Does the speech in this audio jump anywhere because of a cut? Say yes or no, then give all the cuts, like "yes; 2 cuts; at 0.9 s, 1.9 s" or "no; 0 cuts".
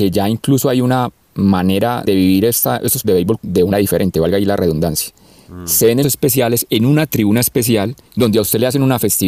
yes; 6 cuts; at 2.1 s, 3.0 s, 3.4 s, 3.7 s, 6.0 s, 8.1 s